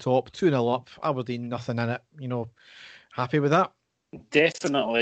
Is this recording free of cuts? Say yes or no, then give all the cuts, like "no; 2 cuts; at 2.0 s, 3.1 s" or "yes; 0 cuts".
yes; 0 cuts